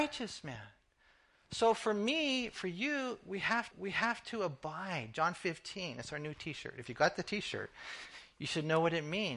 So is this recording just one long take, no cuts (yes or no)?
no